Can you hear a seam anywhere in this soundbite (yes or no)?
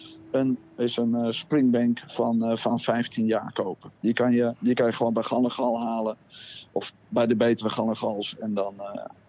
yes